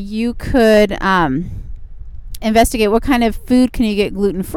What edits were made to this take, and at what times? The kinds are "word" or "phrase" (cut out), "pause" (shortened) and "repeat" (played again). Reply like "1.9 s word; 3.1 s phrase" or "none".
2.4 s word